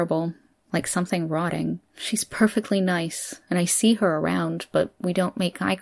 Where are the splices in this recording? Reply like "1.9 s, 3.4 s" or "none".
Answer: 1.9 s